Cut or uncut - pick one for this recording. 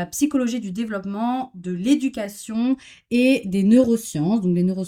uncut